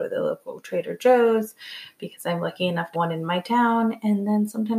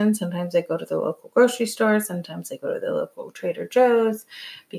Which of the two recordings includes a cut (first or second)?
first